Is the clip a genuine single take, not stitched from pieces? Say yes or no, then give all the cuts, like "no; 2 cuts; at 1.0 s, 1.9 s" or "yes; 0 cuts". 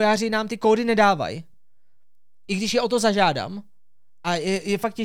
yes; 0 cuts